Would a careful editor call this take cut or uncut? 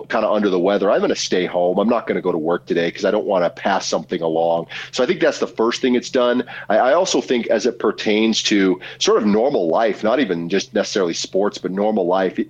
uncut